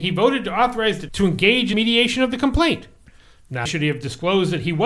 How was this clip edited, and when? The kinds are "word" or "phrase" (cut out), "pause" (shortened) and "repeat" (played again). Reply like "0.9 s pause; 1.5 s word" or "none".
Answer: 1.1 s word; 1.7 s word; 3.7 s word